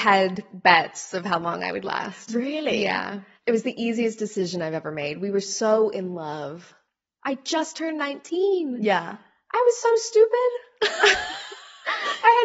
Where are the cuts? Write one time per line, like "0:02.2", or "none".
none